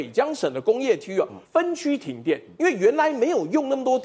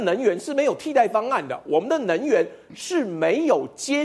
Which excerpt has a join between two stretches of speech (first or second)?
first